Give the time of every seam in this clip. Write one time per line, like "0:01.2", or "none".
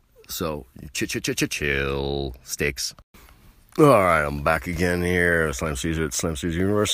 none